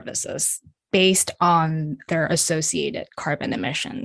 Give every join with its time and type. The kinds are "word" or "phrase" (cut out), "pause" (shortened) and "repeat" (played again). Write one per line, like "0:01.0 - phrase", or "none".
none